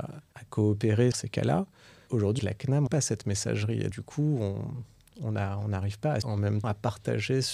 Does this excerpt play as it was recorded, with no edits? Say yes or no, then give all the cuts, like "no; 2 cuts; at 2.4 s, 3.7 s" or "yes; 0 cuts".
no; 6 cuts; at 1.1 s, 2.4 s, 2.9 s, 3.9 s, 6.2 s, 6.6 s